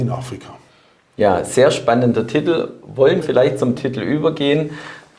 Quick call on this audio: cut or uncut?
cut